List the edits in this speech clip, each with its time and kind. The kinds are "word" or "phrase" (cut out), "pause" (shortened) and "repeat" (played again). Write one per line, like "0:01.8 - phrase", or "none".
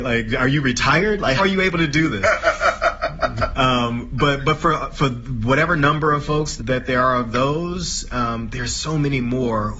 0:01.4 - word
0:06.6 - word